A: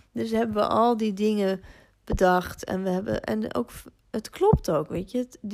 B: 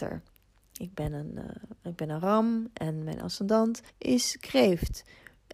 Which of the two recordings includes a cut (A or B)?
B